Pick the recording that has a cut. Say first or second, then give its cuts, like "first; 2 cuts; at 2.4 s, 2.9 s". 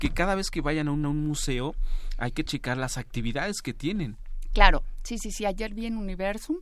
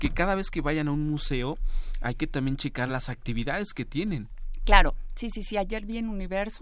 first; 2 cuts; at 1.0 s, 2.5 s